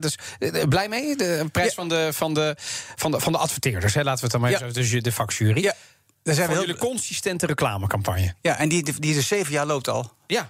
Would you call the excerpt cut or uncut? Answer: uncut